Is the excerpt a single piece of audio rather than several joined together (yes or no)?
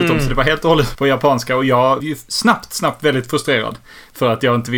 no